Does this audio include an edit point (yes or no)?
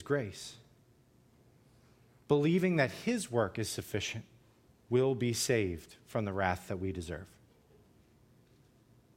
yes